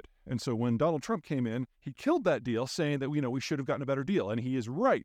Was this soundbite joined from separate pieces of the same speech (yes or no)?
yes